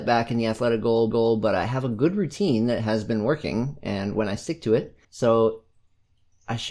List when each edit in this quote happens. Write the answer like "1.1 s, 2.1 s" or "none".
1.1 s, 5.0 s